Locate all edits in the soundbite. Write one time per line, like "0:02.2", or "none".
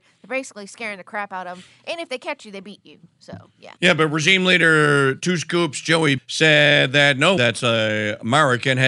0:03.8
0:05.2
0:06.2
0:07.4